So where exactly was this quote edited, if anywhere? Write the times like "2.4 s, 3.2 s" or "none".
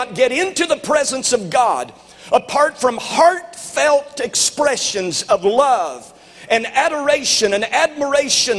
none

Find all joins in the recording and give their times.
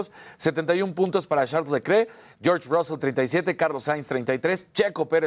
3.0 s

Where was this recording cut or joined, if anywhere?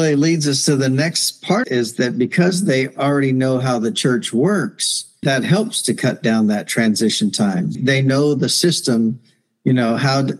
1.6 s, 5.2 s, 7.7 s

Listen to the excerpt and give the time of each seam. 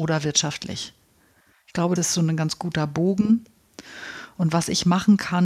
2.0 s

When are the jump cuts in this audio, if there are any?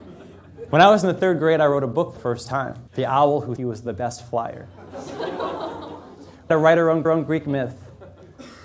2.2 s, 2.9 s, 3.6 s, 6.5 s, 7.0 s

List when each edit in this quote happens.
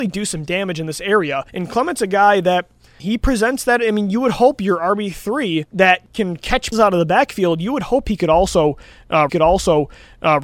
1.5 s, 3.0 s, 6.7 s, 9.3 s

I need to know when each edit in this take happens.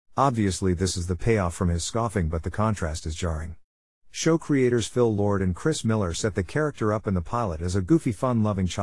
none

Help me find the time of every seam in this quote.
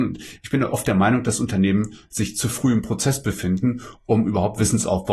none

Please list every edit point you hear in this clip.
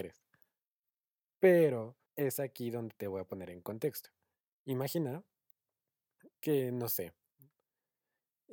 2.1 s, 6.3 s

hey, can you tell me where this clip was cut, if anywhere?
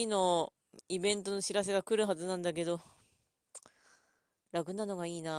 none

